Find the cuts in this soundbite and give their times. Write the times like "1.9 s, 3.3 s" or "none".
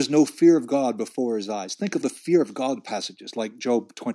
2.0 s